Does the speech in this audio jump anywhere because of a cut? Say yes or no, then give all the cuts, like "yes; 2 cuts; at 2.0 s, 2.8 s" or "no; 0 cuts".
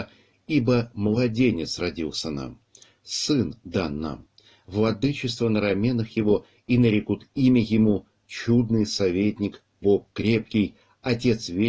no; 0 cuts